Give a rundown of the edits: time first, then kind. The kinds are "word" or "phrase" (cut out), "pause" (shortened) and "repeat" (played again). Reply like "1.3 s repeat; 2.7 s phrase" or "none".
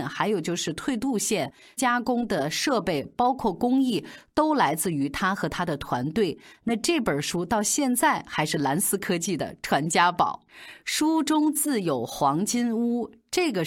1.8 s word